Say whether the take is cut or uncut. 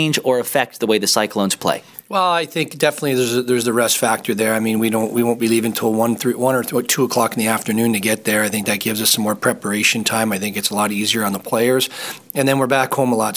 uncut